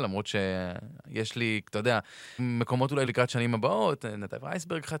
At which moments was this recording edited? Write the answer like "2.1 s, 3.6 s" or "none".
2.4 s, 3.1 s